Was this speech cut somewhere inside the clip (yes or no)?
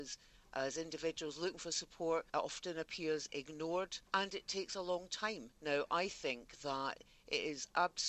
yes